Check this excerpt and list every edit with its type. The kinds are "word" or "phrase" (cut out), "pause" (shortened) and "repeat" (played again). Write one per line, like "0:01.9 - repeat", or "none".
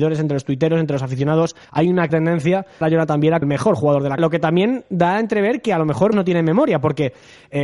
0:01.6 - pause
0:02.1 - word
0:02.8 - phrase
0:03.4 - word
0:04.2 - word
0:06.1 - word